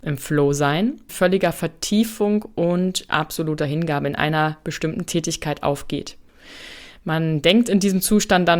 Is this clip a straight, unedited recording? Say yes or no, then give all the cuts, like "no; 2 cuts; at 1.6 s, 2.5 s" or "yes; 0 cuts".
no; 1 cut; at 1.1 s